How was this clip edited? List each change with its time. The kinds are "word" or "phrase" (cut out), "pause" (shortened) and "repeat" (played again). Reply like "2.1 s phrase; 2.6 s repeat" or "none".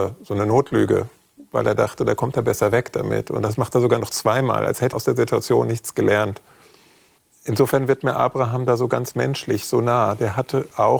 4.9 s word